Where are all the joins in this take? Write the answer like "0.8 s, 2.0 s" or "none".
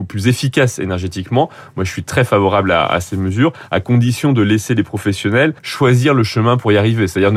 5.6 s